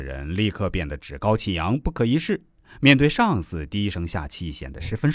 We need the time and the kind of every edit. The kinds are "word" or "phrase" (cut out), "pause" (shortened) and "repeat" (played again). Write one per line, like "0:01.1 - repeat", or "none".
none